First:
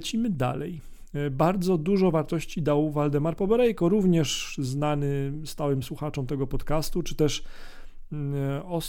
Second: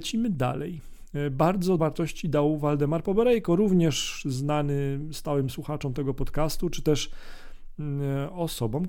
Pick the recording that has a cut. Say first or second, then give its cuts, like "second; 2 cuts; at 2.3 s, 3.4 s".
second; 1 cut; at 1.8 s